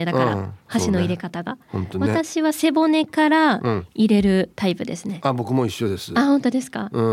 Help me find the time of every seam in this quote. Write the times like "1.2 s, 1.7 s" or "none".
none